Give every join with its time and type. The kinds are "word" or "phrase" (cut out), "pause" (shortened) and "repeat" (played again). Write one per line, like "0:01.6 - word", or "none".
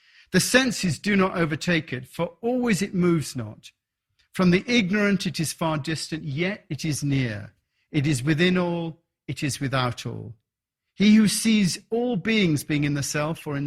none